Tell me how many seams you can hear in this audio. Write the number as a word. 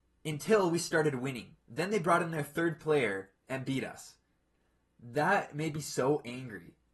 two